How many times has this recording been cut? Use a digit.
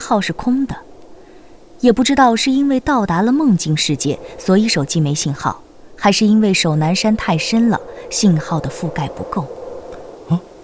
0